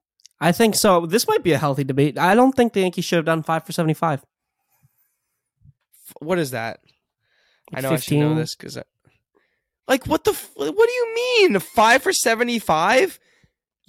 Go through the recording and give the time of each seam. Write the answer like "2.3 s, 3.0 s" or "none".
none